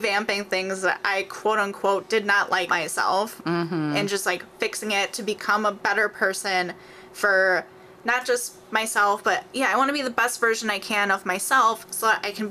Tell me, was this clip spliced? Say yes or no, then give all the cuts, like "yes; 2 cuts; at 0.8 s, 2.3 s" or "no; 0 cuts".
yes; 1 cut; at 2.7 s